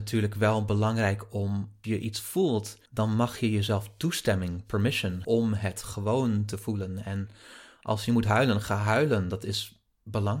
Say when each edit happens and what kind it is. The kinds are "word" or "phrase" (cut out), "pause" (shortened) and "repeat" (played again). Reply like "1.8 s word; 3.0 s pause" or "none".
1.8 s word; 2.9 s pause; 5.2 s word